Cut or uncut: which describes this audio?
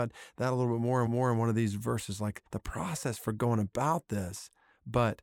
cut